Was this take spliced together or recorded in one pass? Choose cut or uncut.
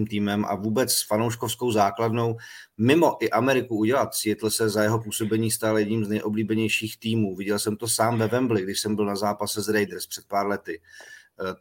uncut